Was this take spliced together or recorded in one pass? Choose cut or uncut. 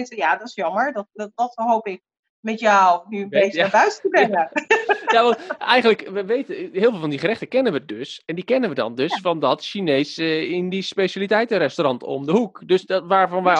uncut